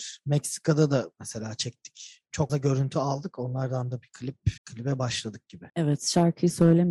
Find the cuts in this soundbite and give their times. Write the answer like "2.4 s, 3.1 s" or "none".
2.5 s, 4.6 s, 5.7 s

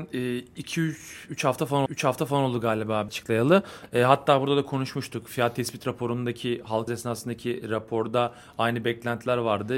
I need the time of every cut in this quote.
1.9 s, 3.1 s, 6.9 s

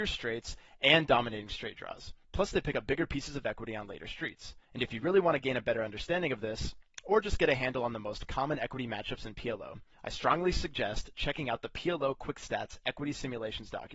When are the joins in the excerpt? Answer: 2.2 s, 4.6 s, 9.9 s

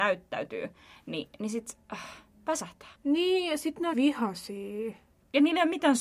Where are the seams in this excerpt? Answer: 1.8 s, 2.9 s, 3.9 s

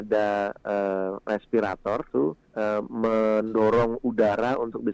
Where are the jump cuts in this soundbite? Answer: 2.1 s, 2.4 s

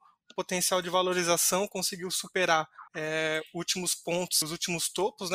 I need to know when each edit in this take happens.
2.9 s, 4.4 s

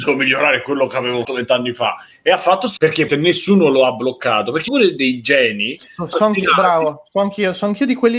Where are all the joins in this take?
1.2 s, 2.8 s, 3.1 s, 4.7 s, 6.1 s

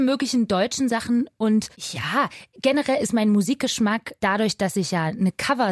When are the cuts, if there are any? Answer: 1.7 s, 4.2 s

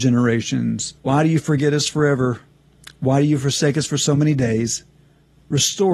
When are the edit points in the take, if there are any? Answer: 1.0 s

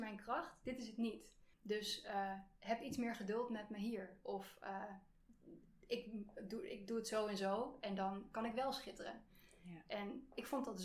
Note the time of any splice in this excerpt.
1.5 s

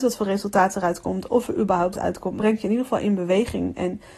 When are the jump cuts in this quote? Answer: 1.9 s, 2.4 s

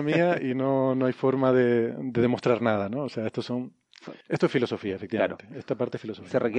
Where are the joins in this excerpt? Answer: 4.2 s

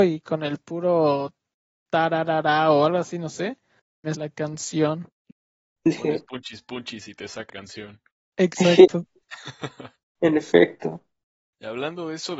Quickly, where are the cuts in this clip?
4.1 s, 7.5 s

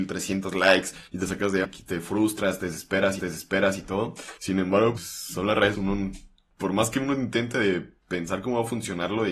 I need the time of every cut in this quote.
1.1 s, 1.6 s, 3.2 s, 4.4 s, 5.0 s, 5.7 s

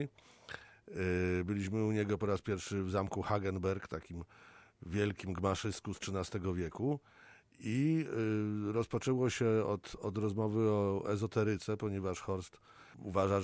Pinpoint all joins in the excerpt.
none

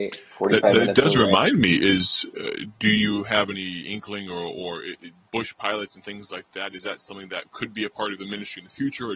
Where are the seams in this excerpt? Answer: none

